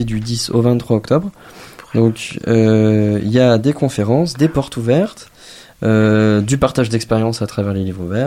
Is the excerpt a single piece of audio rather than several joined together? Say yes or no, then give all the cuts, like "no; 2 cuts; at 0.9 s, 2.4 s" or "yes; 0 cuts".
yes; 0 cuts